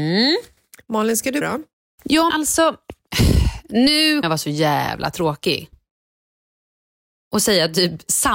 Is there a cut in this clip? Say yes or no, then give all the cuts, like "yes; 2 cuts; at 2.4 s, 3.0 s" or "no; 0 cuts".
yes; 3 cuts; at 1.4 s, 2.3 s, 4.2 s